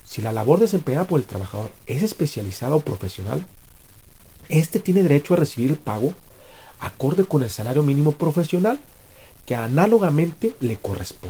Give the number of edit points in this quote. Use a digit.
0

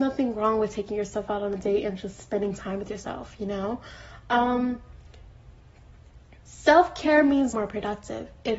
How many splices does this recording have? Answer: 1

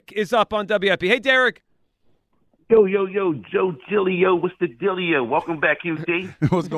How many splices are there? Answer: 0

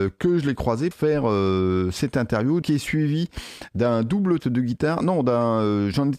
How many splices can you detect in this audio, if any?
3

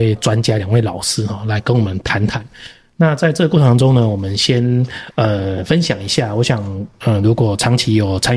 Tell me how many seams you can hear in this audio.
0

